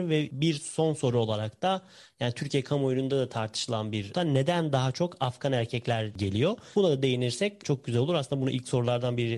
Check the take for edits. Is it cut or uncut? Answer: uncut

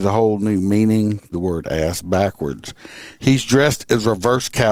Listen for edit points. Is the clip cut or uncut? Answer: cut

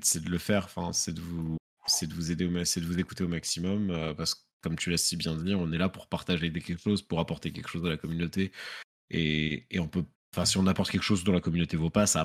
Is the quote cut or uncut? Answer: uncut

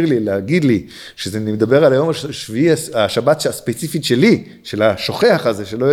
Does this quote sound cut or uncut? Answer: uncut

